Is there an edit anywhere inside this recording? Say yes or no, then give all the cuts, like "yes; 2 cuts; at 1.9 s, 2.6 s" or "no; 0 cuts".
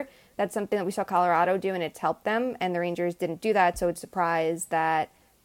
yes; 1 cut; at 4.0 s